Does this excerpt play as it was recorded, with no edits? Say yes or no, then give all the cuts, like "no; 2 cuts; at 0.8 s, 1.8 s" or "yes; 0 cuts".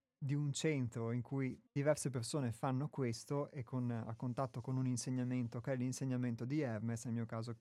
no; 1 cut; at 1.7 s